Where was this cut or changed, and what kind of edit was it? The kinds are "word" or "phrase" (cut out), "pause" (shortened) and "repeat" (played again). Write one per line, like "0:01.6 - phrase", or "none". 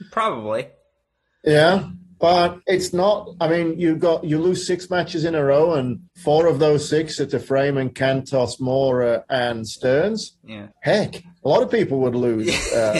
0:02.6 - pause
0:06.1 - pause
0:10.7 - pause